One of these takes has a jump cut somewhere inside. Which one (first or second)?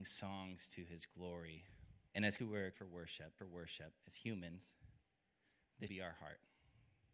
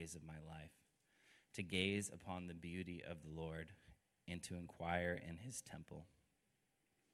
first